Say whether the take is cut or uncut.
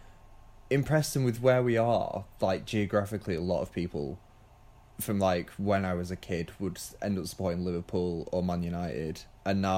uncut